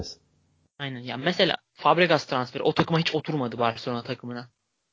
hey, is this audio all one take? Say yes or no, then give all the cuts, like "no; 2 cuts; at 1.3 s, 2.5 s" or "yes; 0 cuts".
yes; 0 cuts